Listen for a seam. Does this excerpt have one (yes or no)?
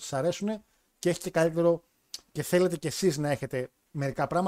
no